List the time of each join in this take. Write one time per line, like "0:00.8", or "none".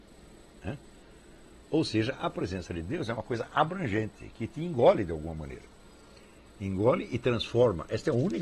none